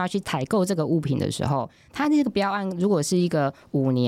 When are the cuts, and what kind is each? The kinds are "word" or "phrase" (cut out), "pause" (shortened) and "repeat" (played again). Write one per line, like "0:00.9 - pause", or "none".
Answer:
none